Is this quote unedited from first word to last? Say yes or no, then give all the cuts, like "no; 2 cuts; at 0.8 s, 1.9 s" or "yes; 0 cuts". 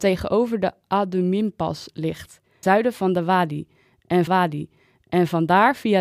no; 2 cuts; at 2.6 s, 4.3 s